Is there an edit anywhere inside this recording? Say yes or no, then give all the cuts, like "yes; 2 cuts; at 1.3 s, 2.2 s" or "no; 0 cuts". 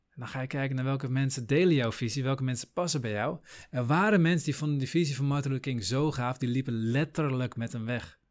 no; 0 cuts